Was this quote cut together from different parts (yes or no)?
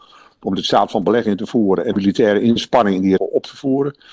yes